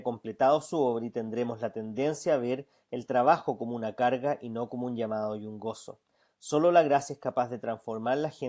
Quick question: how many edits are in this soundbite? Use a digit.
0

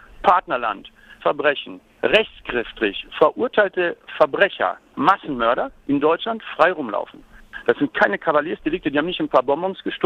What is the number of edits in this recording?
1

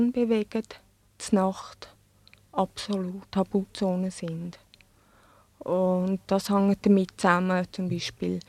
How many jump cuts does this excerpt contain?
0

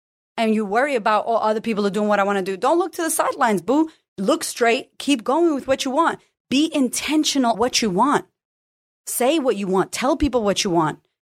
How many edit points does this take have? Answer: 1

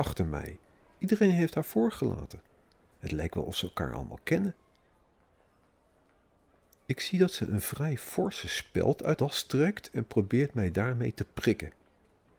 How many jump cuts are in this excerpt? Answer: 1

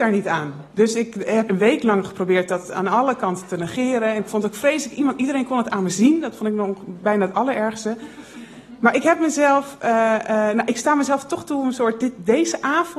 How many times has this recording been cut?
1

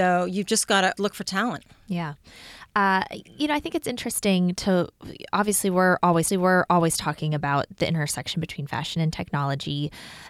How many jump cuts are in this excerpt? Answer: 2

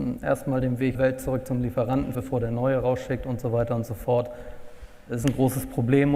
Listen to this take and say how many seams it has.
2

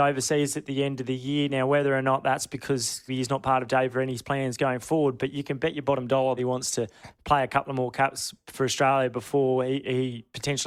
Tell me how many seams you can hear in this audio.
2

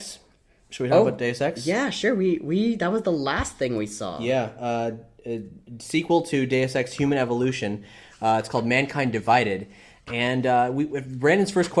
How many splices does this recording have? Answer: 0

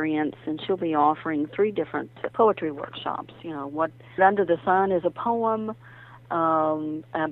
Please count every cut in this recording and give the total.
2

